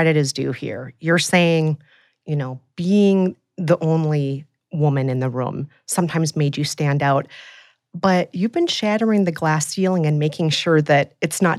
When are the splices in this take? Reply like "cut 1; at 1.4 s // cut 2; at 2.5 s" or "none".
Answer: none

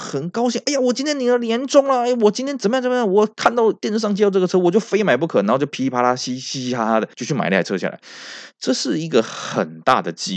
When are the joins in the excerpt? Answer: cut 1; at 7.1 s

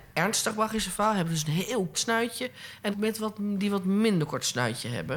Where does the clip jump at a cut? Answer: cut 1; at 1.9 s // cut 2; at 2.9 s

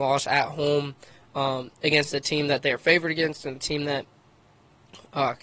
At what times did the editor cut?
none

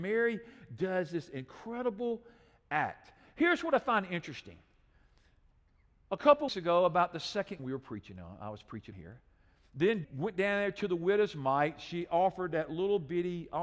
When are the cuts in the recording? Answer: cut 1; at 6.5 s // cut 2; at 7.6 s // cut 3; at 8.9 s // cut 4; at 10.0 s

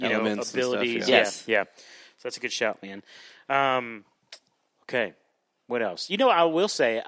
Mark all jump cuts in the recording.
none

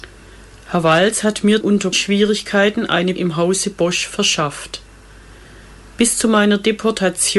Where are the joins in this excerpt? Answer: cut 1; at 1.6 s // cut 2; at 1.9 s // cut 3; at 3.2 s

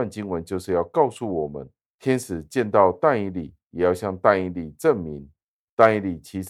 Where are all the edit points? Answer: none

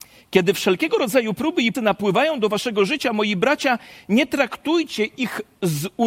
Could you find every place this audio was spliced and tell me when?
cut 1; at 1.7 s

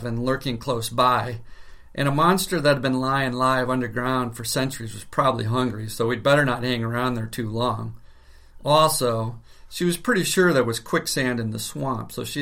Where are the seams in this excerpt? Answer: none

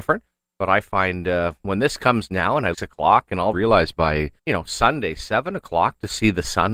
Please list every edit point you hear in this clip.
cut 1; at 2.7 s // cut 2; at 3.5 s // cut 3; at 4.4 s

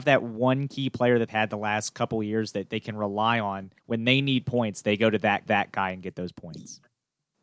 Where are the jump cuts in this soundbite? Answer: cut 1; at 1.3 s // cut 2; at 3.8 s // cut 3; at 5.5 s

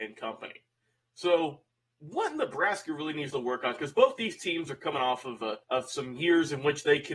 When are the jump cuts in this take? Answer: cut 1; at 5.6 s

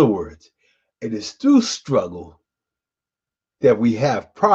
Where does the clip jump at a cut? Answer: none

